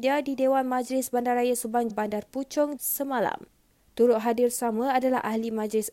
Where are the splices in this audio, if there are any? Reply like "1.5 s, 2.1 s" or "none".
1.9 s, 2.8 s